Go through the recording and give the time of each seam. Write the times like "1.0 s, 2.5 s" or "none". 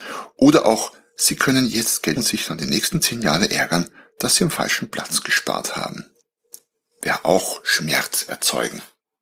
2.2 s